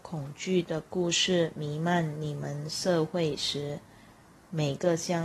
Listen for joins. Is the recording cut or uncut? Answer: uncut